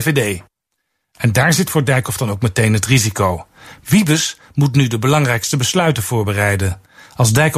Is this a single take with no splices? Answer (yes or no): yes